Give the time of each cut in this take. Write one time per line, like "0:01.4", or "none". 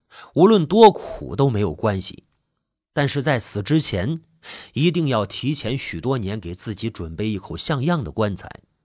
none

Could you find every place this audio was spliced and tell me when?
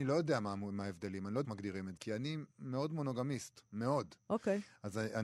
0:01.4
0:02.0
0:02.5
0:03.7

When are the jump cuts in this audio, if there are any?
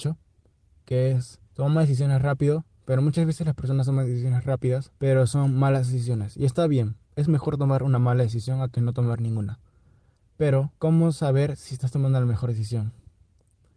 0:01.5
0:05.0
0:07.1
0:10.8

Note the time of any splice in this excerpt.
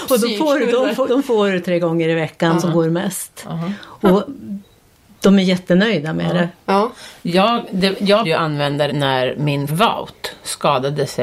0:01.1
0:01.6
0:02.6
0:08.2
0:08.9
0:09.7

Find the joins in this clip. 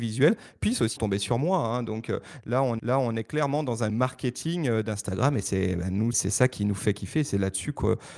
0:01.0
0:02.8
0:03.9
0:06.1

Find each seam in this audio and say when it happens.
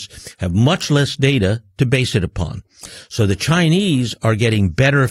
none

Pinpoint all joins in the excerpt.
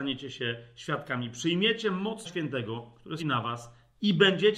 0:02.2
0:03.2

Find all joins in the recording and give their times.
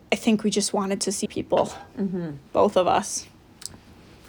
0:01.3
0:02.5

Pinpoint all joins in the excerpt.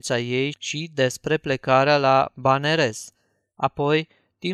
none

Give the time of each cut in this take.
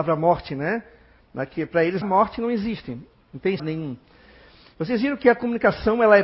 0:02.0
0:03.6

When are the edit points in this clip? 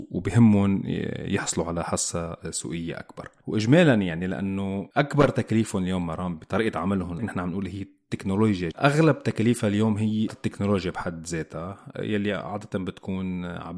0:07.2
0:08.7
0:10.3

